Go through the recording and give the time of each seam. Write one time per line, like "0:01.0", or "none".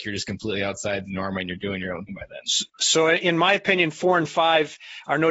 0:02.1
0:02.7

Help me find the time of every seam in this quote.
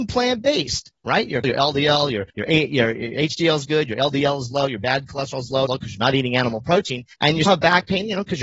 0:01.0
0:01.4
0:02.3
0:05.7
0:07.1
0:07.5

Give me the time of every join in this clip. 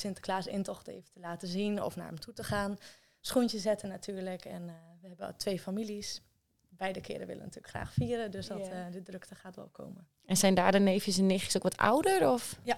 none

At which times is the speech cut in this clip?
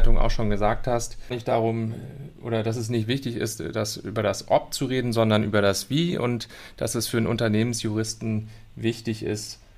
0:01.3

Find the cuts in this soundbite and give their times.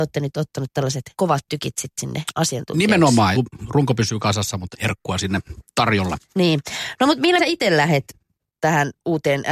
0:01.1
0:03.3
0:04.7
0:06.3
0:07.4

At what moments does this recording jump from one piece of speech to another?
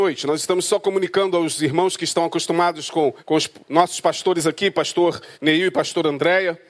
0:03.2
0:05.3

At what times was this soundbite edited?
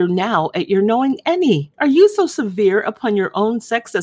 0:01.7

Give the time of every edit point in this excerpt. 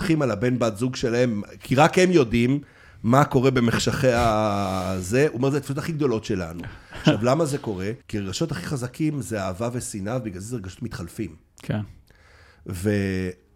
0:08.0

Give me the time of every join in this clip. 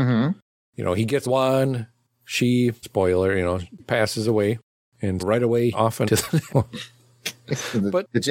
0:01.2
0:02.8
0:03.8
0:05.2
0:05.7
0:06.1
0:06.5

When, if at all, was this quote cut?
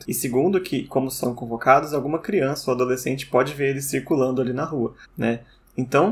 0:01.2
0:05.0

